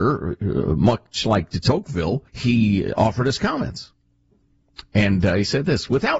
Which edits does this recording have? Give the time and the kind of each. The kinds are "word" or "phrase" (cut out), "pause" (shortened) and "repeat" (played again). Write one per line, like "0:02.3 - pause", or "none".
0:02.3 - pause